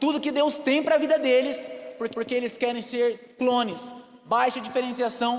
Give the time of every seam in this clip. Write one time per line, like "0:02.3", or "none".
0:02.1